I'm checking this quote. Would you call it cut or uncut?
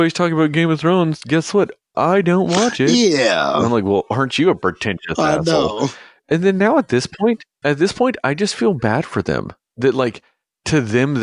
uncut